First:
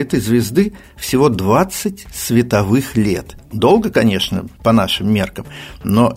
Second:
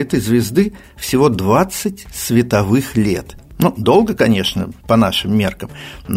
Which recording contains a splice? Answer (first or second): first